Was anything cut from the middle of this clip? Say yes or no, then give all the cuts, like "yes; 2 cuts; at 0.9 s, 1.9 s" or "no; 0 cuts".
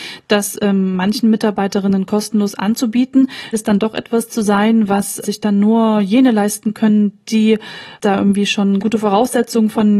yes; 3 cuts; at 3.5 s, 5.2 s, 8.8 s